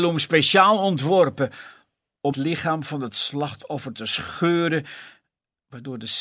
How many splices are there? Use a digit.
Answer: 1